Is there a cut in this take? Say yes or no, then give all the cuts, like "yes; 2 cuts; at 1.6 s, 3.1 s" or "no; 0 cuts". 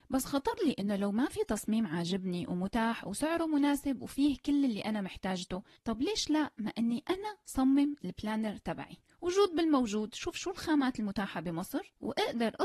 no; 0 cuts